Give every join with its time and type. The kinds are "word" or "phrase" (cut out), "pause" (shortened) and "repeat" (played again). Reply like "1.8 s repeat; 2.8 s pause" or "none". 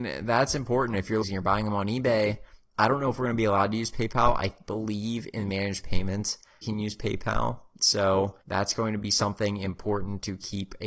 1.2 s phrase; 6.6 s phrase; 8.4 s pause